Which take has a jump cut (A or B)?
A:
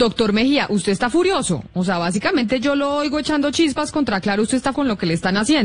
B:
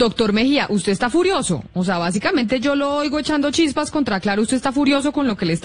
A